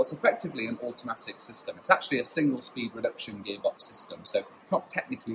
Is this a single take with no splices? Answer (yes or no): yes